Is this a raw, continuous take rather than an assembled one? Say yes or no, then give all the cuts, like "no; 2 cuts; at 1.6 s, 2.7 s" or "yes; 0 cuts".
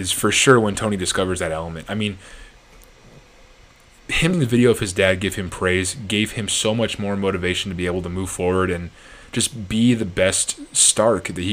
no; 1 cut; at 4.3 s